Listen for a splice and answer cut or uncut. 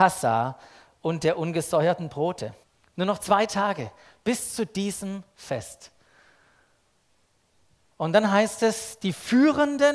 cut